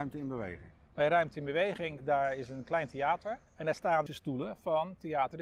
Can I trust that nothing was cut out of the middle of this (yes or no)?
no